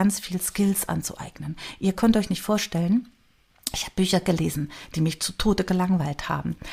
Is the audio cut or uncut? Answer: uncut